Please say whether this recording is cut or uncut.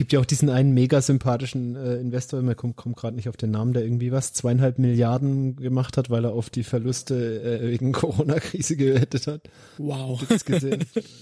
uncut